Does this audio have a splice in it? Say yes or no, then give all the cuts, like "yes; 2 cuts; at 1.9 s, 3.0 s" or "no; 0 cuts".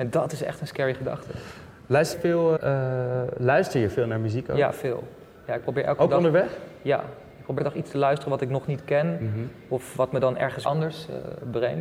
yes; 4 cuts; at 2.1 s, 2.6 s, 7.6 s, 10.6 s